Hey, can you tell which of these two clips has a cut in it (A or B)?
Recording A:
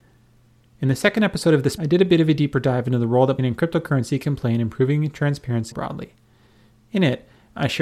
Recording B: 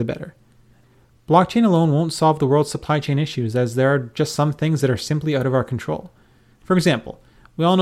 A